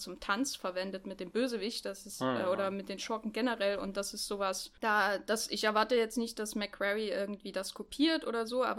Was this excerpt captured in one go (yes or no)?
no